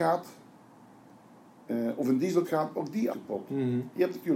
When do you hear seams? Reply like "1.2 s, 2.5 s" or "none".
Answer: 2.4 s, 3.1 s